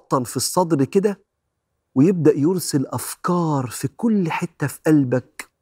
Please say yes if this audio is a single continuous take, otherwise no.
yes